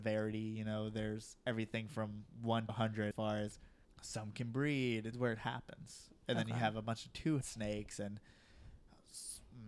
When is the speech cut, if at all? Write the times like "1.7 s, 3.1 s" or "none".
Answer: 2.7 s, 3.1 s, 3.8 s, 5.1 s, 7.4 s